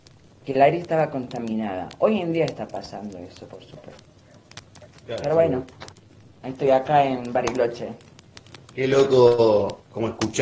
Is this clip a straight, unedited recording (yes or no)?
yes